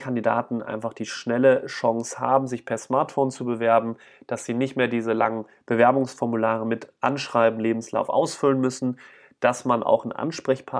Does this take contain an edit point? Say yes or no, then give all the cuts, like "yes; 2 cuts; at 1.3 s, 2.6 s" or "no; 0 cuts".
no; 0 cuts